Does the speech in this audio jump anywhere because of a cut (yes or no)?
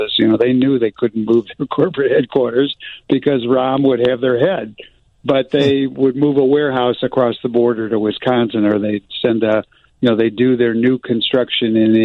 no